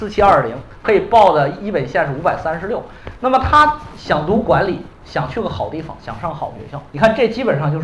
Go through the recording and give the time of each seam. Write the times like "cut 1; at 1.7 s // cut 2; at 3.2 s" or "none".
cut 1; at 6.9 s